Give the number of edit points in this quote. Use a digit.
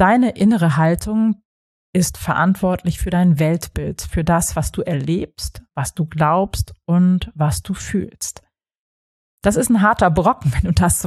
0